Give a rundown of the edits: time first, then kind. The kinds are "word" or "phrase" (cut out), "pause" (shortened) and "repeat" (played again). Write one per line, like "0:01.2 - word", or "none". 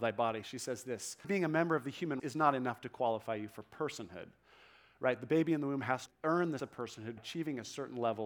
0:01.2 - word
0:02.2 - word
0:06.1 - word
0:06.6 - word
0:07.2 - word